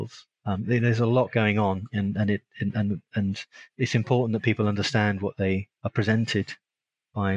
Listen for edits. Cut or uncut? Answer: uncut